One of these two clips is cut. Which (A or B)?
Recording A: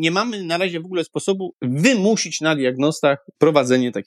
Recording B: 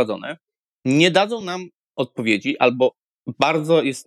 A